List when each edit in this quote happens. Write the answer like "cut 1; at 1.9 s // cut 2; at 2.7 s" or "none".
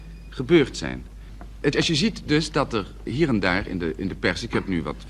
cut 1; at 1.7 s // cut 2; at 3.1 s